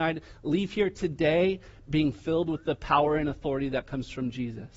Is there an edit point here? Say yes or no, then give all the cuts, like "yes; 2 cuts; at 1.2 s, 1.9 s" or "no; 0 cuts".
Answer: no; 0 cuts